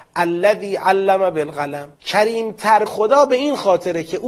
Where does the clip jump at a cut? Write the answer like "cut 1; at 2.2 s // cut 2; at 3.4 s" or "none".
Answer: cut 1; at 2.0 s // cut 2; at 2.9 s